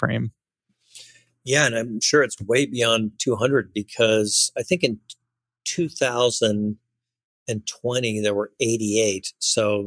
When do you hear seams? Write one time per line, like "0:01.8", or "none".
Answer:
none

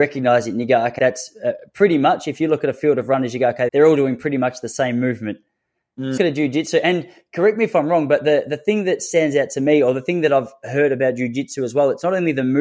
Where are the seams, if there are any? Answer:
0:01.0
0:03.7
0:06.2

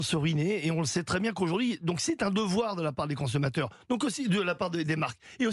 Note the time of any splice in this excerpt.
none

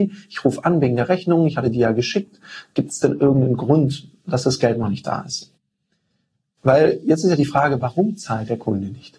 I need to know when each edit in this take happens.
none

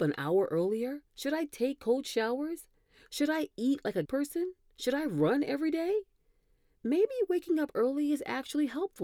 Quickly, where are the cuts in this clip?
0:01.1
0:04.0

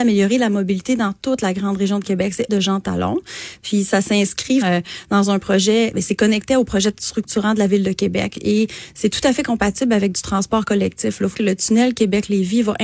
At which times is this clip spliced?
0:02.5
0:04.6
0:11.3

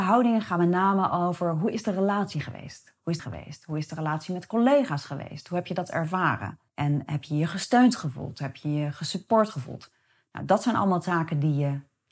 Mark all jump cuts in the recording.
0:03.2
0:06.7

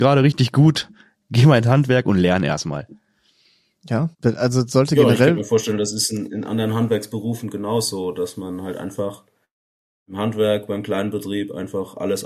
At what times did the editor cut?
0:04.1

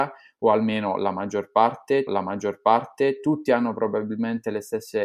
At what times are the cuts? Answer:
0:02.1

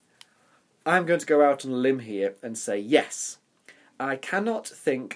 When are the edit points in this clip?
none

